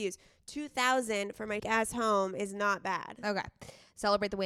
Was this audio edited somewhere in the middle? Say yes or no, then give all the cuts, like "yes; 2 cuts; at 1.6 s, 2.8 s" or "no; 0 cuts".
yes; 1 cut; at 1.6 s